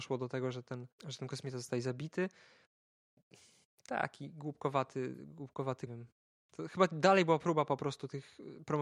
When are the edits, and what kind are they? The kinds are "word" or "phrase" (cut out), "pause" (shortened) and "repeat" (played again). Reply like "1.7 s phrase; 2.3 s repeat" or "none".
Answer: 1.0 s pause; 5.9 s phrase

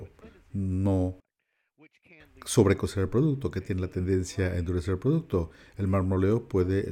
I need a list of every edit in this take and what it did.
none

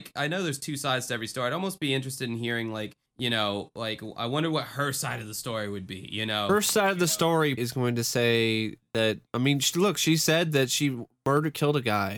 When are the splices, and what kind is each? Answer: 3.1 s pause; 7.6 s word; 9.3 s pause

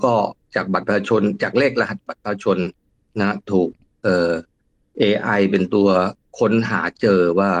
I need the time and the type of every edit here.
none

